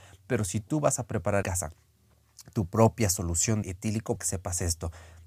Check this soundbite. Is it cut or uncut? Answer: cut